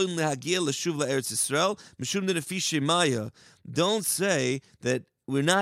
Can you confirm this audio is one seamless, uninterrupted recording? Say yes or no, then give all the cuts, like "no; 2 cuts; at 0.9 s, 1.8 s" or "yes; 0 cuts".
yes; 0 cuts